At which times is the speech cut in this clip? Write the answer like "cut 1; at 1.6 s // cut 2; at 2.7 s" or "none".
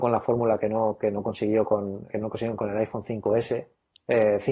cut 1; at 2.1 s